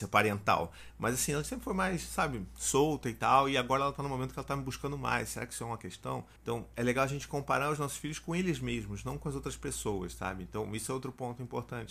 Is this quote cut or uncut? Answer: cut